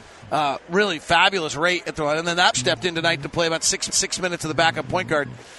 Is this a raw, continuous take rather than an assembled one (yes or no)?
no